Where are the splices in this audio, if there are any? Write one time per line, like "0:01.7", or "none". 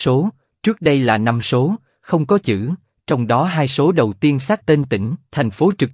0:04.6

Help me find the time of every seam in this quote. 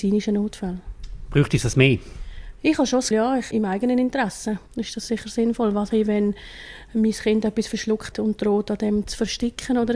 0:03.1
0:03.5
0:04.7
0:05.9
0:08.1

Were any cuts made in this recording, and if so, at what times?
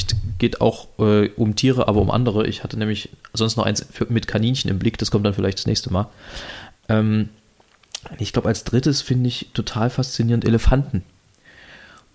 none

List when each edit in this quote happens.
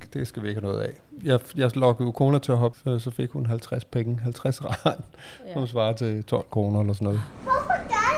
0:02.7

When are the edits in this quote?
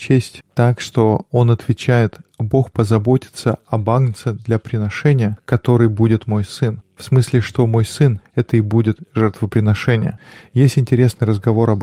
none

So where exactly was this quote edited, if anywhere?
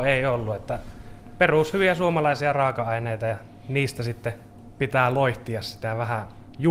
none

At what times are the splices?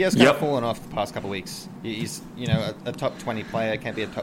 0:01.8

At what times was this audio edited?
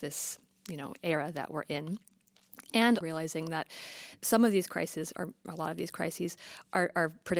0:03.0

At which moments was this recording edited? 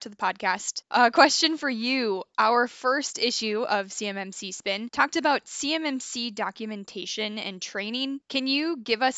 none

